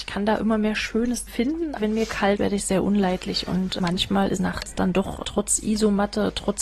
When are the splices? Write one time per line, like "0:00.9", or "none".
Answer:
0:01.3
0:01.8
0:02.4
0:03.8
0:04.4
0:05.2